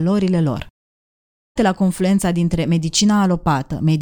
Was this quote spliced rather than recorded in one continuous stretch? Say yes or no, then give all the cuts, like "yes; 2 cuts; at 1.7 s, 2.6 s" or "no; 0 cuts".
yes; 1 cut; at 1.6 s